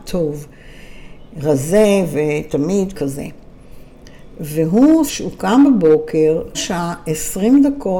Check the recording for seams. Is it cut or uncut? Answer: cut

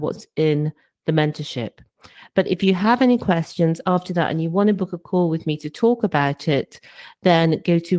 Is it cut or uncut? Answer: uncut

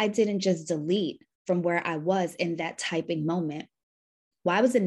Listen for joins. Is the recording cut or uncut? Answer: uncut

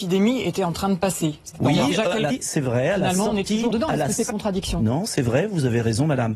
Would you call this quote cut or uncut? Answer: cut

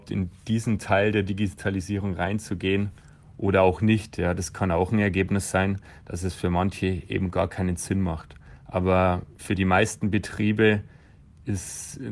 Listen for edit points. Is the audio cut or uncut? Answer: cut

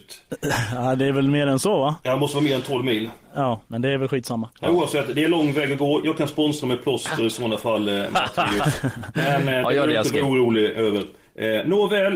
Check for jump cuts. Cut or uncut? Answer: cut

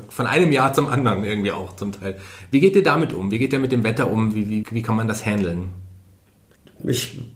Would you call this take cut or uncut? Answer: cut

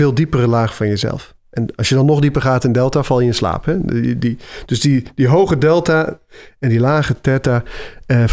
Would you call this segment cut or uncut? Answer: uncut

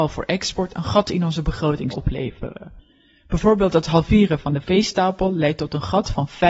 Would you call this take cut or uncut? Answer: cut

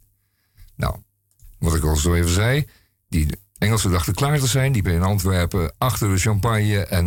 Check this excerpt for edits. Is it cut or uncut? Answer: cut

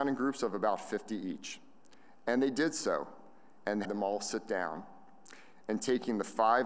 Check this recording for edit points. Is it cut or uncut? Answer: cut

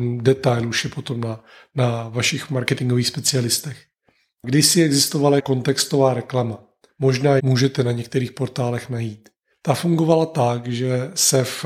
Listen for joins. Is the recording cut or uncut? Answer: cut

